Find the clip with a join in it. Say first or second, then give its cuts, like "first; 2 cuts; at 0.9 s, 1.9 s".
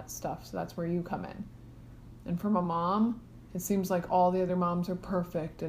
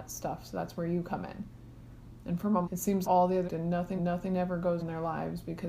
second; 5 cuts; at 2.6 s, 3.0 s, 3.5 s, 4.0 s, 4.8 s